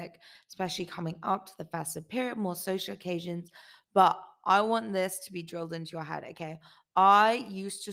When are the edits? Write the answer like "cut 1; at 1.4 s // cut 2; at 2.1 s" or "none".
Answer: none